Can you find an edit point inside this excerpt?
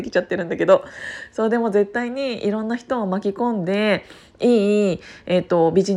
no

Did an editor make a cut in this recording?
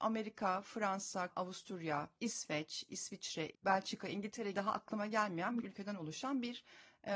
yes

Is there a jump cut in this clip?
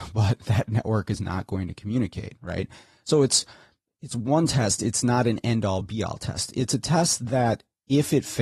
no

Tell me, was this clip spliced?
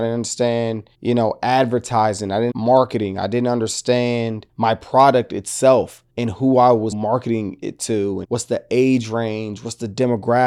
yes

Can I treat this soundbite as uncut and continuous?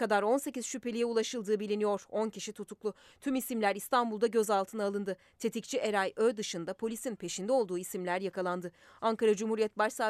yes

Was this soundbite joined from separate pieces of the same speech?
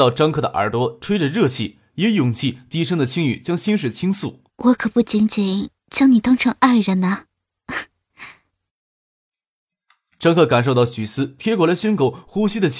yes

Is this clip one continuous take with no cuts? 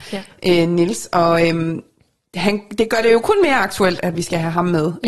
yes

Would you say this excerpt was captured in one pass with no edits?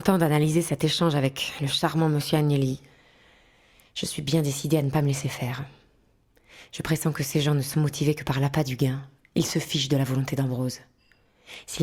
yes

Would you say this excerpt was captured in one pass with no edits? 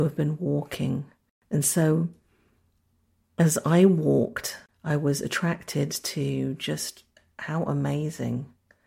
yes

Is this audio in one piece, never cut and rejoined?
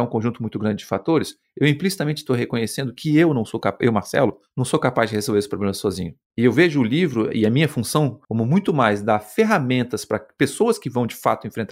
no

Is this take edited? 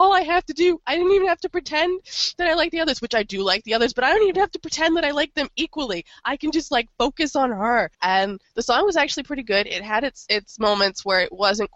yes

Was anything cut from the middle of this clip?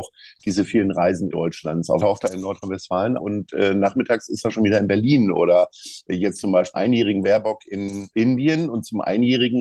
yes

